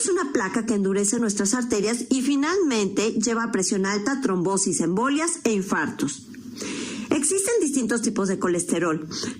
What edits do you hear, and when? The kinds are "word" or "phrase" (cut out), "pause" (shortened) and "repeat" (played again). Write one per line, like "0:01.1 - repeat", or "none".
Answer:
none